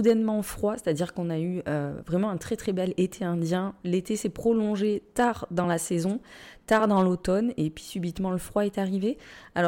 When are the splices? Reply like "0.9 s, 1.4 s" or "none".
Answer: none